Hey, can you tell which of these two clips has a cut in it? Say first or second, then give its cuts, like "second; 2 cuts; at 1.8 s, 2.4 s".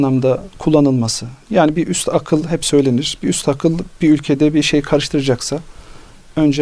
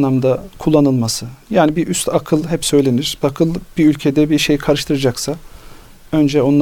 second; 1 cut; at 3.2 s